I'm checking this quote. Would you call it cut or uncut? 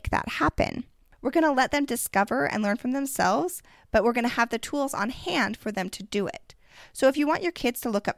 uncut